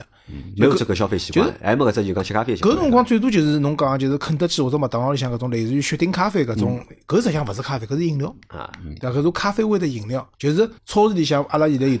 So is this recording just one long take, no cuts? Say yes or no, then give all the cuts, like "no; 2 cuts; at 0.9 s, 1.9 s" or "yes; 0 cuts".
no; 2 cuts; at 10.3 s, 10.8 s